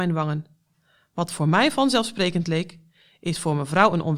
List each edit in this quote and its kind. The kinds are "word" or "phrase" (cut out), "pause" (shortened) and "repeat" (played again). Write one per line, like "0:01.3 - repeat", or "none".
none